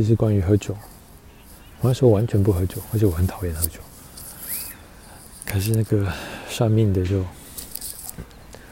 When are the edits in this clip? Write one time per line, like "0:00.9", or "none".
none